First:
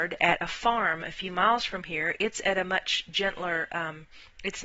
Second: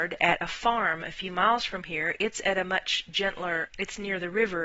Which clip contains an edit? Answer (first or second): second